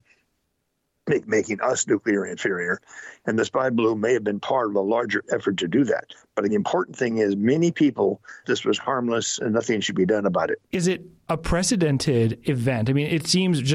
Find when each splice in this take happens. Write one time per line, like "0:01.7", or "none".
0:06.5
0:08.4
0:09.8
0:10.6